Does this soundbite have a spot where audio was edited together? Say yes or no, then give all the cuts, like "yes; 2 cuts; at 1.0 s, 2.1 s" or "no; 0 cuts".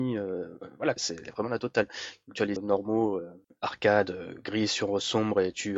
yes; 2 cuts; at 1.0 s, 2.6 s